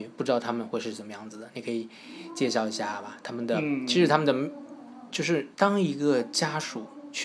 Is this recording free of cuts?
no; 1 cut; at 5.5 s

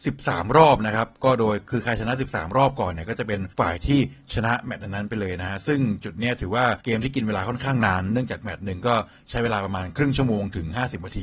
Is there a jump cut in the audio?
yes; 2 cuts; at 3.5 s, 6.8 s

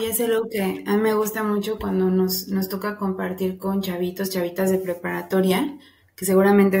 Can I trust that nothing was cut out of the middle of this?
yes; 0 cuts

